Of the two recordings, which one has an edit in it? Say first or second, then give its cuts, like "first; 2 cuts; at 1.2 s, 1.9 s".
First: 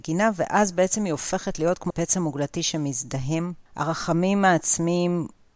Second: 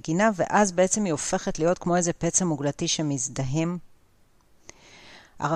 first; 2 cuts; at 1.9 s, 3.7 s